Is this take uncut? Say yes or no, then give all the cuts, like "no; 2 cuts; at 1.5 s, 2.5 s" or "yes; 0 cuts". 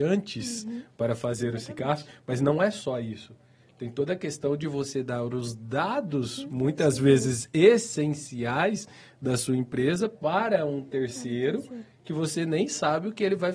yes; 0 cuts